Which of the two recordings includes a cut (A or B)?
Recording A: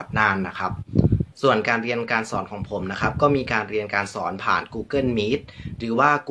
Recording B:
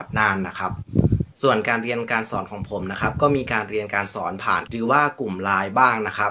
B